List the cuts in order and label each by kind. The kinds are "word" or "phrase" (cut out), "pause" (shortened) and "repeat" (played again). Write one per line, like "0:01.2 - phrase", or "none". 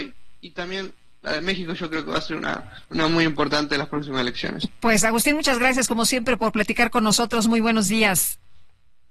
0:02.8 - pause